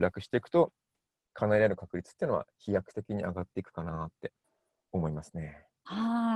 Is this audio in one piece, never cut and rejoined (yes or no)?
no